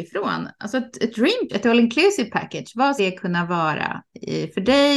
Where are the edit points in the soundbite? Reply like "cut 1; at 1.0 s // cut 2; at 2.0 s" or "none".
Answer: cut 1; at 1.5 s // cut 2; at 3.0 s

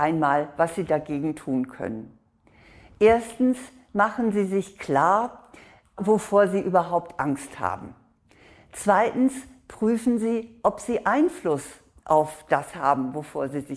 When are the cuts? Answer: none

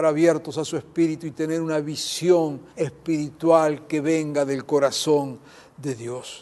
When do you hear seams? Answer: cut 1; at 2.7 s

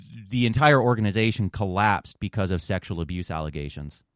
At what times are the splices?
none

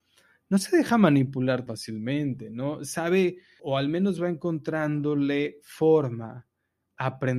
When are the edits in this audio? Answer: cut 1; at 1.7 s // cut 2; at 3.6 s

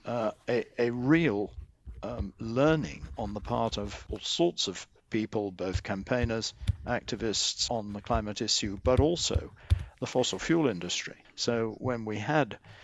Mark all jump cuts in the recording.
cut 1; at 4.1 s // cut 2; at 7.7 s // cut 3; at 11.2 s

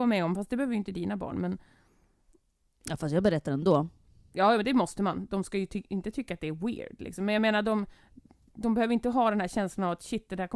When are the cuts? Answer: none

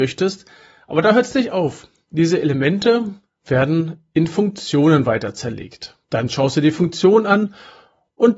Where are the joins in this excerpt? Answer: cut 1; at 6.0 s

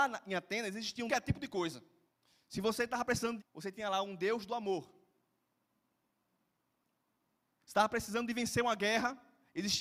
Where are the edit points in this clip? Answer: cut 1; at 1.1 s // cut 2; at 2.1 s // cut 3; at 3.4 s

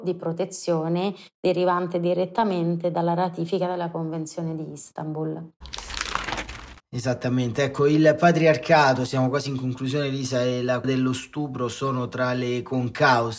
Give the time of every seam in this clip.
cut 1; at 10.8 s

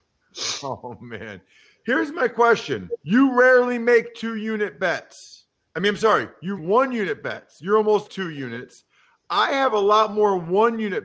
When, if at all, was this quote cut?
cut 1; at 3.0 s // cut 2; at 5.7 s // cut 3; at 6.6 s // cut 4; at 8.0 s

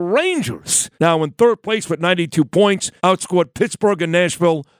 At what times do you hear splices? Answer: cut 1; at 0.9 s // cut 2; at 3.0 s

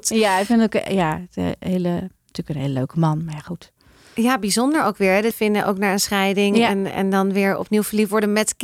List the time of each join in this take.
cut 1; at 5.3 s

